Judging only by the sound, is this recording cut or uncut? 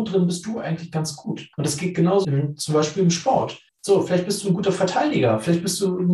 cut